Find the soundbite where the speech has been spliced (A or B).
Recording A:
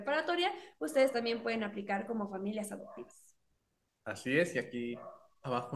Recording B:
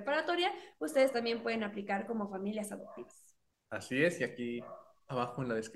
B